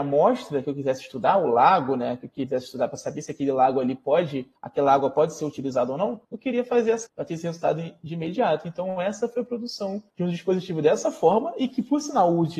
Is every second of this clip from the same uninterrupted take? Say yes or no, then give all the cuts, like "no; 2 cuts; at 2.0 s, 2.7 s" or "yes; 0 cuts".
no; 4 cuts; at 4.6 s, 6.2 s, 7.1 s, 10.1 s